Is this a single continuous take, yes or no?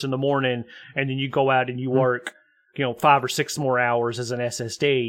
yes